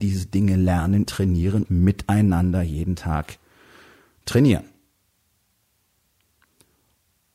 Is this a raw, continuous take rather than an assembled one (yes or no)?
no